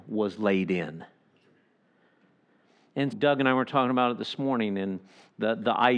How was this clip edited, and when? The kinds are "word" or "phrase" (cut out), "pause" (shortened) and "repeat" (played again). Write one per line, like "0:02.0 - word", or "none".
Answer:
0:03.1 - word